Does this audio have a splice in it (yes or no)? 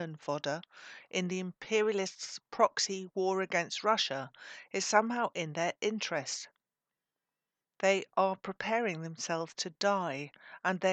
no